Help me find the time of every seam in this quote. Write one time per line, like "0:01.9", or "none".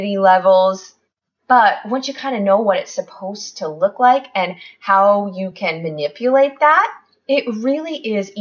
none